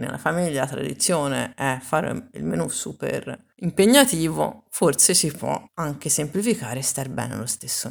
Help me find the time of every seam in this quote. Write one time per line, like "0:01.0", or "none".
0:03.5
0:05.7